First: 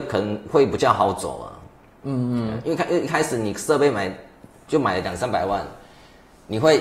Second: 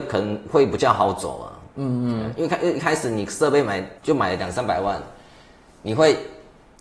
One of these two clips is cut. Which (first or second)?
second